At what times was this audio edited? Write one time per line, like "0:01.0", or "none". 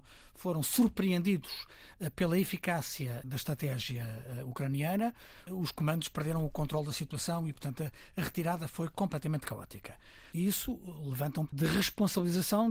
0:11.5